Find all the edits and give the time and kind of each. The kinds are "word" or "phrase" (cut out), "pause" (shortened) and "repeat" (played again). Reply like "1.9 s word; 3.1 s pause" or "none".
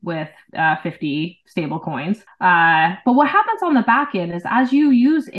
2.3 s pause